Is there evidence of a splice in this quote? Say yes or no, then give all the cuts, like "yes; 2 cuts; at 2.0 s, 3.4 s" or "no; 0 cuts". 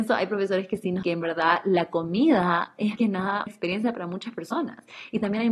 yes; 3 cuts; at 1.0 s, 3.0 s, 3.5 s